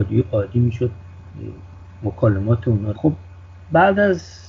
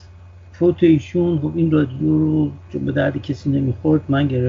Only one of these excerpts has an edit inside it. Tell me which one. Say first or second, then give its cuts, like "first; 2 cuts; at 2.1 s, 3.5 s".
first; 1 cut; at 2.9 s